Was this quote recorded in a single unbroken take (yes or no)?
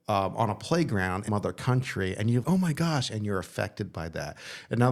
no